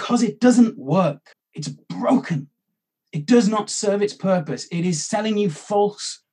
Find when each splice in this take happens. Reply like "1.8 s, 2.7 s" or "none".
1.3 s